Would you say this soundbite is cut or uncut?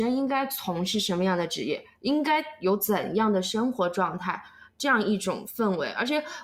uncut